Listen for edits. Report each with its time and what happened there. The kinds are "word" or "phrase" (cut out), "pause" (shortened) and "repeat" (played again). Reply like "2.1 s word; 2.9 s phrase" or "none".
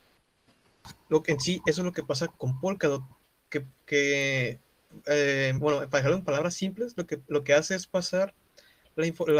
none